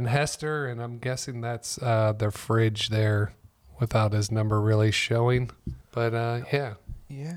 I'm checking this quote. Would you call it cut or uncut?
cut